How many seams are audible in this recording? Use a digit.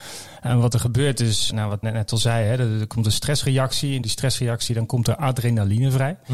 3